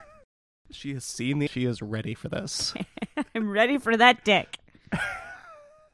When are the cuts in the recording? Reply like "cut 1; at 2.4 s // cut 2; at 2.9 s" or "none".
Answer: cut 1; at 1.5 s